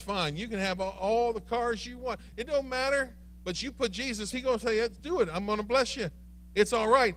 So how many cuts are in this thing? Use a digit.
2